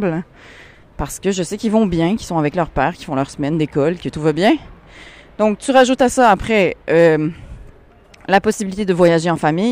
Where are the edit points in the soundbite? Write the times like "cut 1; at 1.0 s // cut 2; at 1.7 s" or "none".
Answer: none

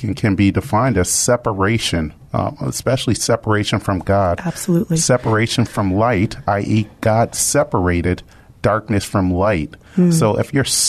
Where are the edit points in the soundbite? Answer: none

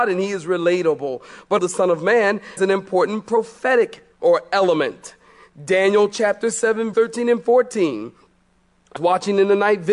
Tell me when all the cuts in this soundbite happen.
cut 1; at 1.6 s // cut 2; at 2.6 s // cut 3; at 4.1 s // cut 4; at 6.9 s // cut 5; at 9.0 s

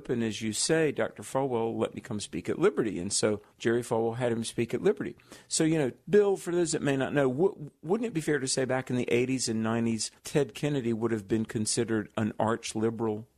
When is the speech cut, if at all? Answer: cut 1; at 3.5 s // cut 2; at 6.0 s // cut 3; at 10.2 s

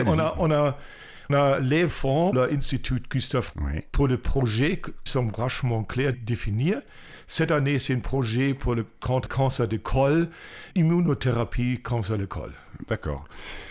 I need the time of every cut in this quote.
cut 1; at 1.3 s // cut 2; at 1.9 s // cut 3; at 2.3 s // cut 4; at 3.5 s // cut 5; at 5.1 s // cut 6; at 6.1 s // cut 7; at 9.3 s // cut 8; at 10.7 s

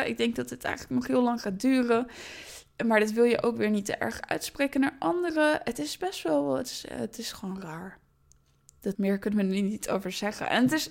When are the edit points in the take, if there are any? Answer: cut 1; at 8.9 s

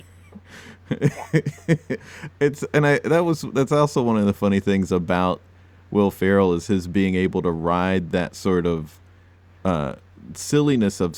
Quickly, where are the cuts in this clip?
none

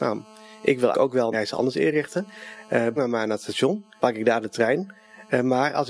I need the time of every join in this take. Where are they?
cut 1; at 0.9 s // cut 2; at 1.3 s // cut 3; at 3.0 s // cut 4; at 4.0 s

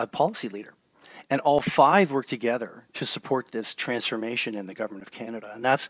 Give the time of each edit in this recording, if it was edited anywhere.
none

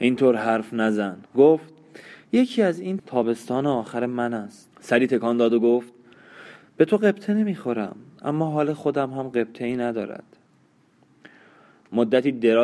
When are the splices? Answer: cut 1; at 1.3 s // cut 2; at 3.0 s // cut 3; at 4.7 s

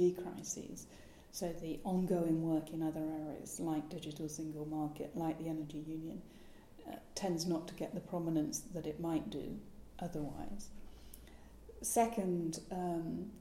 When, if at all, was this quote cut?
none

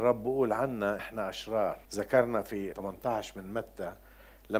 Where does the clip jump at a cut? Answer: cut 1; at 1.0 s // cut 2; at 1.8 s // cut 3; at 2.7 s

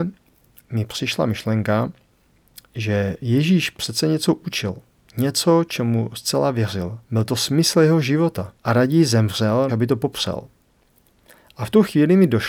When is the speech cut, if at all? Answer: cut 1; at 7.0 s // cut 2; at 8.6 s // cut 3; at 9.7 s

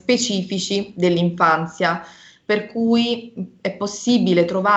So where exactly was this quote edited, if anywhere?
none

